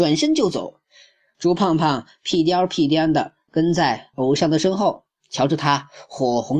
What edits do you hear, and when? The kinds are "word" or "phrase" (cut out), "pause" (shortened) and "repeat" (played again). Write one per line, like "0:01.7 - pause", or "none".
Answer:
none